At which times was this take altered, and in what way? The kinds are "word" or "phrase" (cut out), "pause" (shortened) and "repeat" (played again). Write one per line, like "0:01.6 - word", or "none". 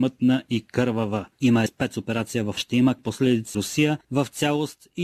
0:01.7 - phrase
0:02.6 - word
0:03.0 - word
0:03.5 - word